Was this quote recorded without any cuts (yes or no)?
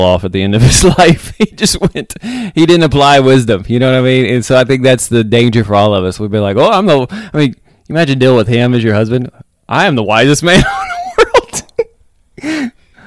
yes